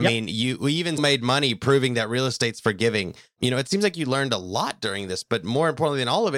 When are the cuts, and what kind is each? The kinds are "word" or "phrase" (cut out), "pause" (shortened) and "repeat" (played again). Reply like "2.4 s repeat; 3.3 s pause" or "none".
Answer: 1.0 s word; 5.2 s word